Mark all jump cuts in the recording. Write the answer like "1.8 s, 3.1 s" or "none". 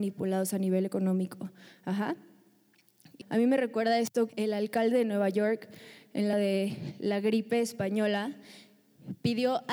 3.2 s, 4.3 s, 6.3 s